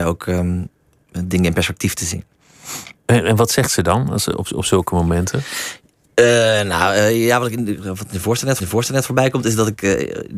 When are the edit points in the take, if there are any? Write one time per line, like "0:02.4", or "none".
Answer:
0:03.0
0:08.6